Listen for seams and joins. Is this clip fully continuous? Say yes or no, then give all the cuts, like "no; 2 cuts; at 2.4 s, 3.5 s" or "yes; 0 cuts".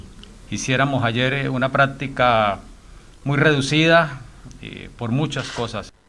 yes; 0 cuts